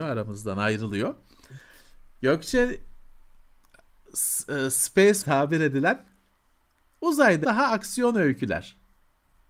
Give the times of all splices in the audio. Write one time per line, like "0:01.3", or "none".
0:05.2
0:07.4